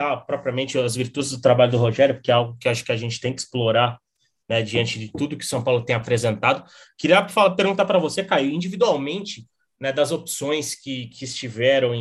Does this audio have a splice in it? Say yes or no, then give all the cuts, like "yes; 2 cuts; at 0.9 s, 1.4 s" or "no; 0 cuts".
no; 0 cuts